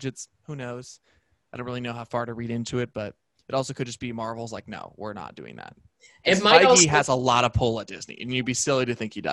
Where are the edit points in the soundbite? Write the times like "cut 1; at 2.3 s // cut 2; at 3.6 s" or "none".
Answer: none